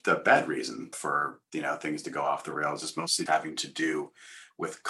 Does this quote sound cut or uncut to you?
cut